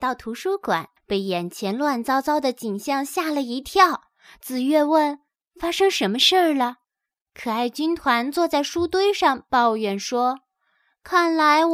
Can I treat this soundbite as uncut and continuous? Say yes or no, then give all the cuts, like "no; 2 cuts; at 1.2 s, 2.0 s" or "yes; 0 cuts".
no; 2 cuts; at 1.0 s, 6.8 s